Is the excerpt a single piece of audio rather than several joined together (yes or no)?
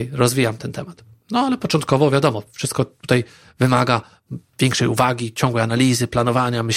yes